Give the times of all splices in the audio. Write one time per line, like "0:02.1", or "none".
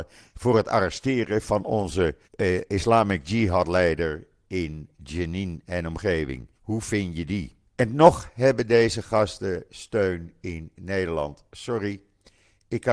0:02.2
0:06.5
0:07.7